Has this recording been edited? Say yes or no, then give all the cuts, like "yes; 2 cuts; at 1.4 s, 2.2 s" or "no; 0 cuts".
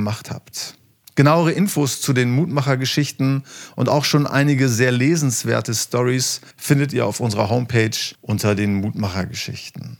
yes; 2 cuts; at 6.5 s, 8.1 s